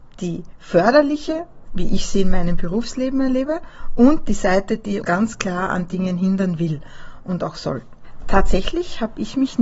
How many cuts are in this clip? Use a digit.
2